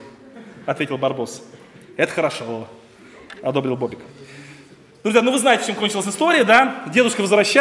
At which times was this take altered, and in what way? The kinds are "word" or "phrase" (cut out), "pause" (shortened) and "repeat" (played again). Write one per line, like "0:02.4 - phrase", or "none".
none